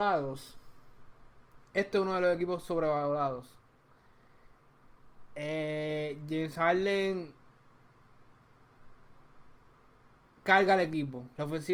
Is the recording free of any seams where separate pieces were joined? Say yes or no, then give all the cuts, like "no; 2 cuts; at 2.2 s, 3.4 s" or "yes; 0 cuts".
yes; 0 cuts